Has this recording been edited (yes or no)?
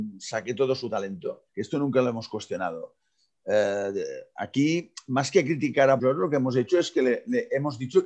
yes